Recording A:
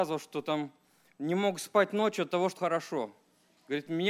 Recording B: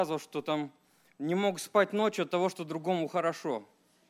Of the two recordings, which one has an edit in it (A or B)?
A